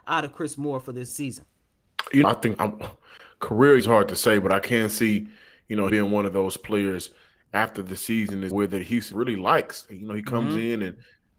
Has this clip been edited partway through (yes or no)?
yes